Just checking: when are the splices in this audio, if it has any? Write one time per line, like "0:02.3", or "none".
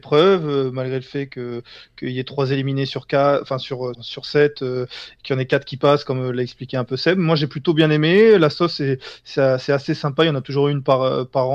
0:03.9